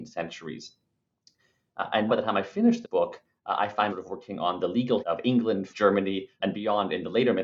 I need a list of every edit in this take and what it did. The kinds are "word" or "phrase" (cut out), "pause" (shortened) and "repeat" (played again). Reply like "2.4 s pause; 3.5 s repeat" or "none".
2.1 s word; 2.8 s word; 3.9 s word; 5.0 s word; 5.7 s word; 6.4 s word